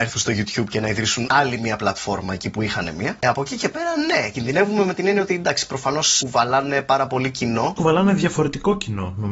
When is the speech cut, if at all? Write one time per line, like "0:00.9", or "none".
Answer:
none